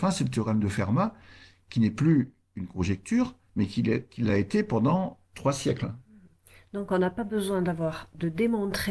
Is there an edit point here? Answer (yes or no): no